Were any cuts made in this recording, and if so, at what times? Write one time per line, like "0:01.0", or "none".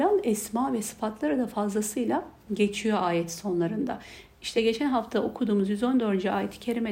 none